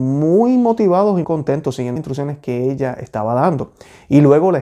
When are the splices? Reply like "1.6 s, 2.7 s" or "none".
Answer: 1.2 s, 2.0 s